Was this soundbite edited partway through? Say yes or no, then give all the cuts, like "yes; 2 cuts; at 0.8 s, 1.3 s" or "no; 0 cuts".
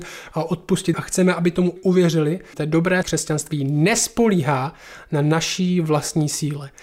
yes; 4 cuts; at 0.9 s, 1.8 s, 2.5 s, 3.0 s